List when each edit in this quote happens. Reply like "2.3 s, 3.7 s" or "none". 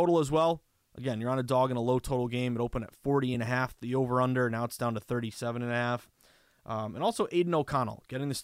none